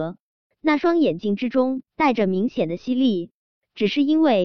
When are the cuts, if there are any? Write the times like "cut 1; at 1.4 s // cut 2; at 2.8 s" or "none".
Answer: cut 1; at 1.9 s